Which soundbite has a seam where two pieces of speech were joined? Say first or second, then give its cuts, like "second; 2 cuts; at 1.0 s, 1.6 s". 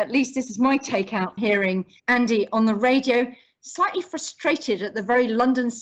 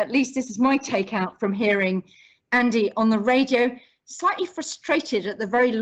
first; 2 cuts; at 1.4 s, 2.0 s